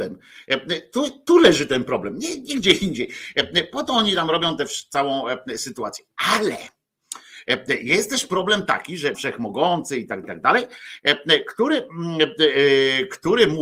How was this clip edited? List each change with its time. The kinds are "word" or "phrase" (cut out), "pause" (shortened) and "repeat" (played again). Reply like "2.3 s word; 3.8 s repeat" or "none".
9.1 s phrase; 10.2 s word